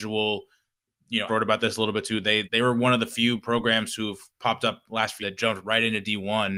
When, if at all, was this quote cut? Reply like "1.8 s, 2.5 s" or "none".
1.3 s, 2.4 s, 4.3 s, 5.2 s